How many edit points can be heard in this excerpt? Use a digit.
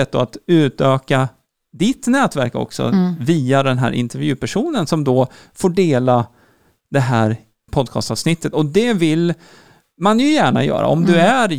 1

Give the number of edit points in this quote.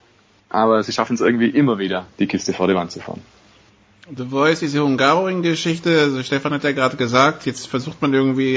0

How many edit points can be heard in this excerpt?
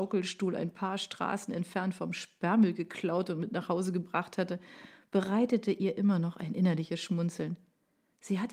0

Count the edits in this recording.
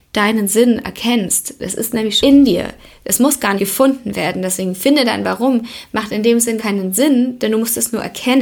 3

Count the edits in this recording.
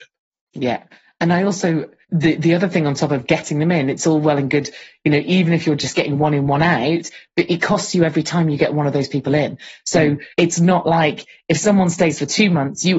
2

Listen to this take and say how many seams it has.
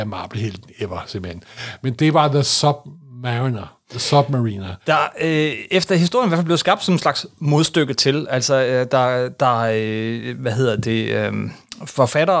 1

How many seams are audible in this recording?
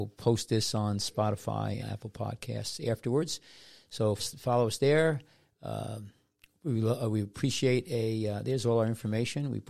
2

